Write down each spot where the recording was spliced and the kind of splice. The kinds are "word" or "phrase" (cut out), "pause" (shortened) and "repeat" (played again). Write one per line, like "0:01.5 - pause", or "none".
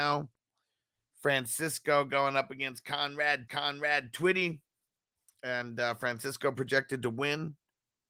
0:03.5 - repeat